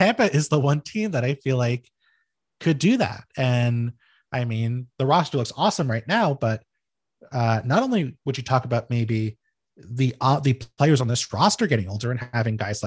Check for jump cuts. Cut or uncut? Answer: uncut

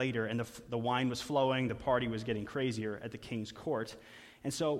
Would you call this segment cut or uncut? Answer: uncut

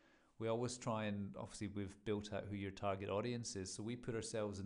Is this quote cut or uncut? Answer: uncut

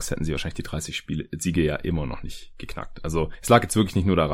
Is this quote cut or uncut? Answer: uncut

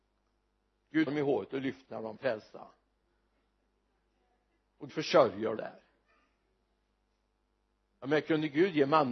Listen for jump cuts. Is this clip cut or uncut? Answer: cut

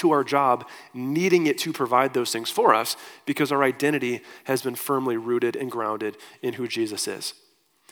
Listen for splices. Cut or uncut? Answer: uncut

